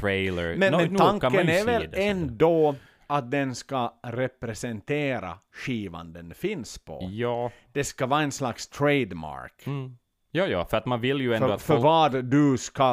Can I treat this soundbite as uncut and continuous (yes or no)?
yes